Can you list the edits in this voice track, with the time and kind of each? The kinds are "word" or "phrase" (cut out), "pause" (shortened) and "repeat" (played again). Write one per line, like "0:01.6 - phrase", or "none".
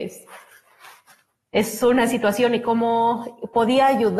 none